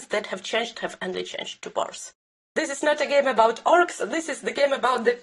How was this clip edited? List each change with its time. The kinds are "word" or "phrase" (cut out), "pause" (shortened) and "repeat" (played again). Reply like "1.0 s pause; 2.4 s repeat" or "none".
2.3 s pause